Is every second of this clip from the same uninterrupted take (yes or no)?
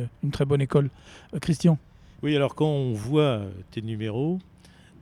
yes